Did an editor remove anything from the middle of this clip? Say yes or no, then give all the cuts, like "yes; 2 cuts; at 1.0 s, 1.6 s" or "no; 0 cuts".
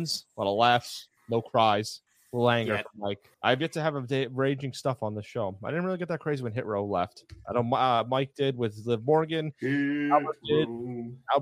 yes; 3 cuts; at 1.2 s, 2.1 s, 3.3 s